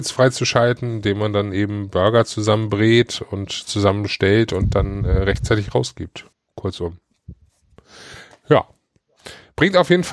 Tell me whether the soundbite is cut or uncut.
cut